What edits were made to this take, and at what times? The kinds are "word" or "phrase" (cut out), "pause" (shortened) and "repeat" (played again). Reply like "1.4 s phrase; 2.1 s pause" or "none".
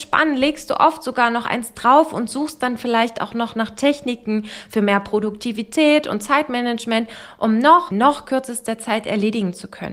7.9 s phrase